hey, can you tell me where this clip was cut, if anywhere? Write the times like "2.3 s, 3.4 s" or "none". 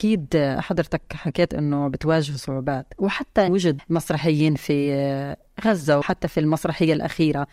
3.5 s, 3.8 s, 6.0 s